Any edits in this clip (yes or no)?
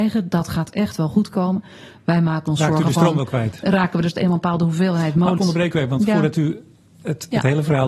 yes